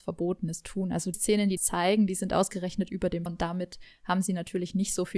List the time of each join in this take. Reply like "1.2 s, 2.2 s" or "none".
1.1 s, 1.6 s, 3.3 s